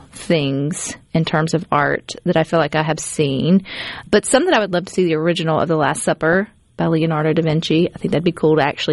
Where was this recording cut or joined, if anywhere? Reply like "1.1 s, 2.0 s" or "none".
1.0 s, 4.1 s, 4.7 s